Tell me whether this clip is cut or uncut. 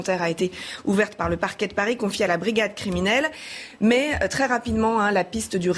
uncut